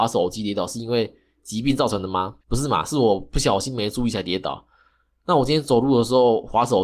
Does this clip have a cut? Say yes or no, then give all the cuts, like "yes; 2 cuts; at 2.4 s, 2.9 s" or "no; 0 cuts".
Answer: yes; 1 cut; at 2.4 s